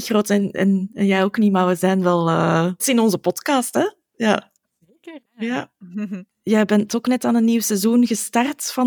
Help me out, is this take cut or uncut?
cut